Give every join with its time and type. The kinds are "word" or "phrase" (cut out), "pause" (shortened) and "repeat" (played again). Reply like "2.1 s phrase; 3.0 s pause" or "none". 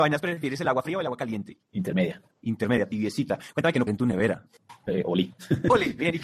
2.3 s pause; 3.9 s phrase